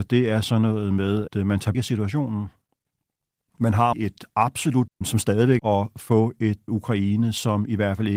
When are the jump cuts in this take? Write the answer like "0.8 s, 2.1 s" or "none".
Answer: 1.3 s, 1.7 s, 3.9 s, 4.9 s, 5.6 s, 6.7 s